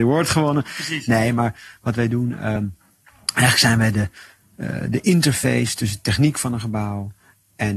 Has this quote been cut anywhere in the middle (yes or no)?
no